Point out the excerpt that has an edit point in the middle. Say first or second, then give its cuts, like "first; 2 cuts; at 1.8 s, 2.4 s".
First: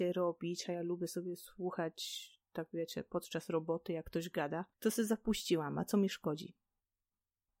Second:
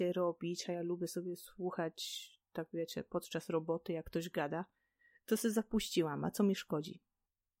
first; 1 cut; at 4.7 s